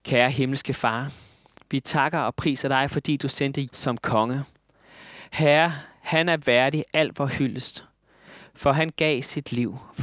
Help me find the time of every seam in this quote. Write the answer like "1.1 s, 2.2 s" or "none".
3.7 s